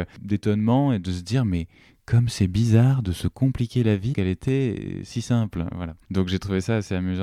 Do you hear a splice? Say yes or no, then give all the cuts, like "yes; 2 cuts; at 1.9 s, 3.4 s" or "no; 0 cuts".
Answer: yes; 1 cut; at 4.1 s